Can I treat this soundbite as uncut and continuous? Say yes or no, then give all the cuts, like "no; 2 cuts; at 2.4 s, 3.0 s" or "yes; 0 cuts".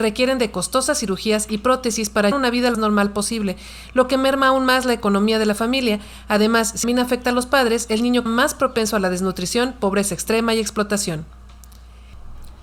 no; 4 cuts; at 2.3 s, 2.7 s, 6.8 s, 8.3 s